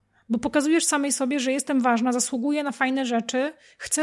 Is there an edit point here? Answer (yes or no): no